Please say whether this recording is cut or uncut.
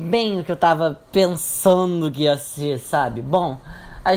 uncut